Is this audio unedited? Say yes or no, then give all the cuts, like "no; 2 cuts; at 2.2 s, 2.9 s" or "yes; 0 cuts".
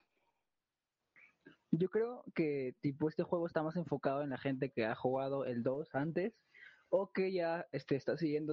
yes; 0 cuts